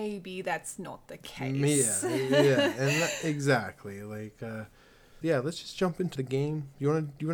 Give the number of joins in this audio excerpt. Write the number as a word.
two